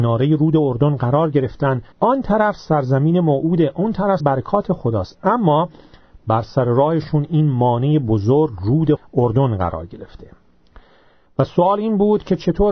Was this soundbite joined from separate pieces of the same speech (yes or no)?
yes